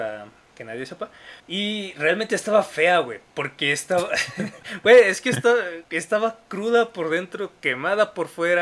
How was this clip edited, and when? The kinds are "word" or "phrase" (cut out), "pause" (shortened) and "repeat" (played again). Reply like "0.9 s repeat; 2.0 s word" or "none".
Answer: 1.4 s pause; 3.3 s pause; 5.8 s pause